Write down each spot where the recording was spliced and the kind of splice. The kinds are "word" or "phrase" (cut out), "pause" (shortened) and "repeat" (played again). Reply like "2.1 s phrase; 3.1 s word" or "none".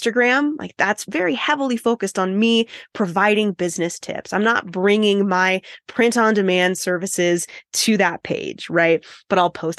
none